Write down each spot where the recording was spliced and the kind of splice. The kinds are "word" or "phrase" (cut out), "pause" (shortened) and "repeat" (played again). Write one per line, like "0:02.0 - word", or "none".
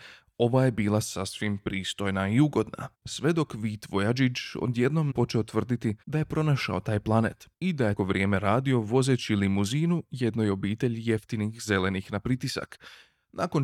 0:02.9 - pause
0:05.1 - word
0:06.0 - pause
0:07.5 - pause
0:08.0 - phrase